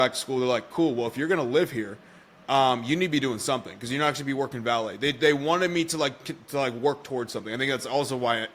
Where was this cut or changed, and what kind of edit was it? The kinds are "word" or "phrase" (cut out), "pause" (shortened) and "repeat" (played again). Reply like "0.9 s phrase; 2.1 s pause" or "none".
none